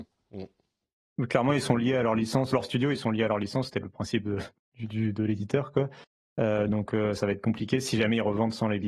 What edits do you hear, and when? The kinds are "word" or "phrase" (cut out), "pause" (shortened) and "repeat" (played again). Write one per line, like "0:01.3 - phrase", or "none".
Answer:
0:02.5 - phrase